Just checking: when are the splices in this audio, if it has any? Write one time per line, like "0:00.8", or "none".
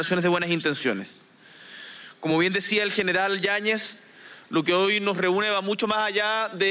none